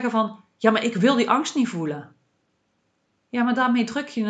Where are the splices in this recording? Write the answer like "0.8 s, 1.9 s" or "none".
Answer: none